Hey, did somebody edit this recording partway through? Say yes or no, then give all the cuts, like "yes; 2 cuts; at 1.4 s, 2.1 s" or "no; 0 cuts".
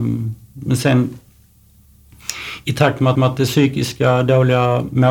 yes; 1 cut; at 3.1 s